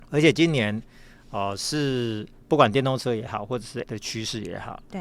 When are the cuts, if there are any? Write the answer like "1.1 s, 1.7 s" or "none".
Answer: 3.9 s